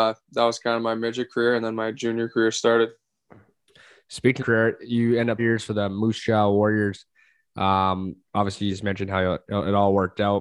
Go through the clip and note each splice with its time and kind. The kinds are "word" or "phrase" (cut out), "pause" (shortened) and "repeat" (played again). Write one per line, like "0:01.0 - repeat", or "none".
0:04.4 - phrase
0:05.4 - phrase